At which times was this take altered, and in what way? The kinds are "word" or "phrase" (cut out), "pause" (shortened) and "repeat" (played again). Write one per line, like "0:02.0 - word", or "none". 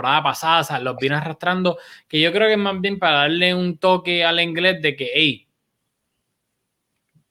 none

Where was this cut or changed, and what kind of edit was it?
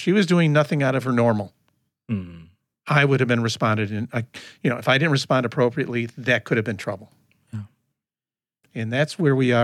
none

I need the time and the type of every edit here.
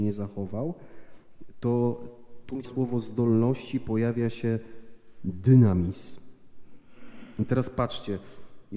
0:02.6 - word

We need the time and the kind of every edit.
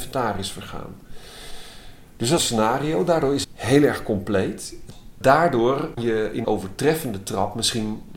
0:02.4 - phrase
0:03.4 - word
0:06.0 - word
0:06.4 - phrase

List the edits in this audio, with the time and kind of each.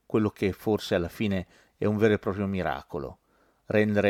none

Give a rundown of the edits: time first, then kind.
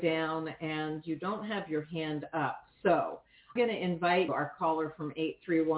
0:03.6 - word
0:04.3 - word

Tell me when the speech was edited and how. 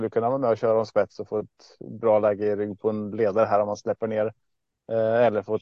none

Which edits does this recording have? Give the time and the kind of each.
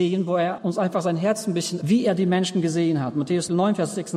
0:01.8 - phrase

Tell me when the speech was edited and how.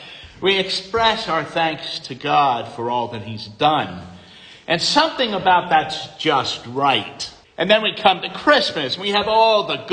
0:07.4 - pause

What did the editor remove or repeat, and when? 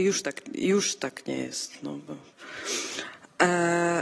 none

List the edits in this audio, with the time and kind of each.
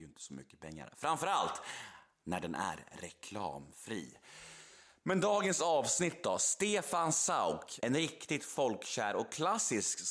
none

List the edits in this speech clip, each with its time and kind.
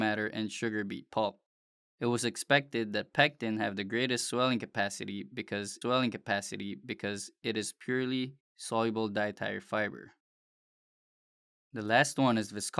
0:05.8 - repeat

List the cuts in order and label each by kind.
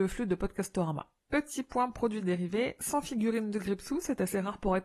0:01.2 - pause

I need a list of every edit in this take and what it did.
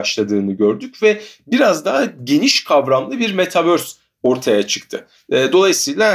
none

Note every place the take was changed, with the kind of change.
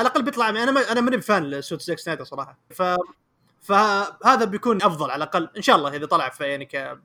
0:02.7 - phrase
0:04.8 - word

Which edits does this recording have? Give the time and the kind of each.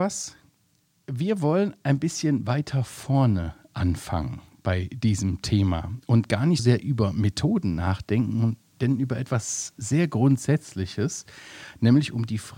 0:06.6 - word

